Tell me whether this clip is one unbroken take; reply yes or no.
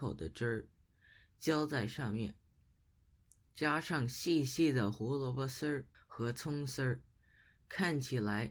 no